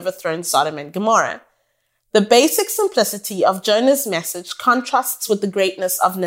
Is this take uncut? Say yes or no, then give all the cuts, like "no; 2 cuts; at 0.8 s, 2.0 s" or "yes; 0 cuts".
yes; 0 cuts